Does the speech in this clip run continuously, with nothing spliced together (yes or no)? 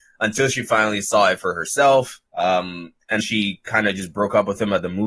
no